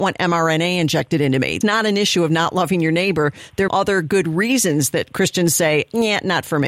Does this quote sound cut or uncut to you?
cut